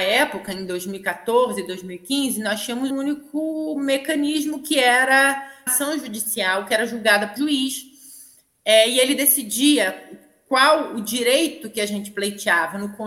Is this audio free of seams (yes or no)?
no